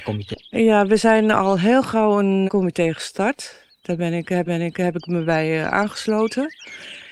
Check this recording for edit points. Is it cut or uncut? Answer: cut